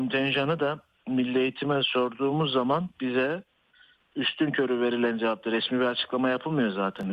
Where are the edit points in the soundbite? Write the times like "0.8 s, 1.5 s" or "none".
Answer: none